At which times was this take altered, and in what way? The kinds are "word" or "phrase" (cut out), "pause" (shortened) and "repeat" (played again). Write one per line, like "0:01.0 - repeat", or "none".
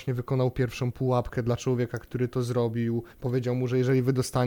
0:03.1 - pause

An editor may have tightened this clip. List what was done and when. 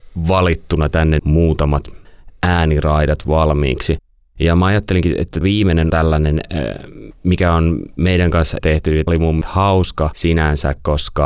0:01.2 - word
0:05.4 - word
0:05.9 - word
0:08.6 - word
0:09.1 - word
0:09.4 - word

